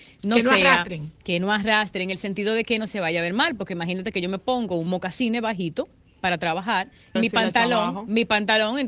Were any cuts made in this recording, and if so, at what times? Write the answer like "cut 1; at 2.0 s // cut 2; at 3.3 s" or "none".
cut 1; at 7.2 s